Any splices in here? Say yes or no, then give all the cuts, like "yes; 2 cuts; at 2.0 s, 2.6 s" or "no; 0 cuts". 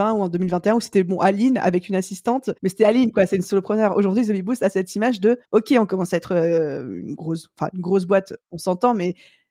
yes; 2 cuts; at 2.6 s, 5.4 s